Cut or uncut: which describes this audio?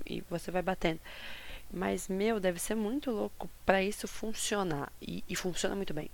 uncut